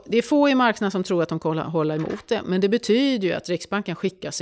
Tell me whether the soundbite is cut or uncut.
uncut